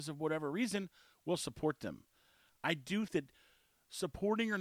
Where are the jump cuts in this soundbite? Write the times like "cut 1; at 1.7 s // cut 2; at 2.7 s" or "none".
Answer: cut 1; at 3.1 s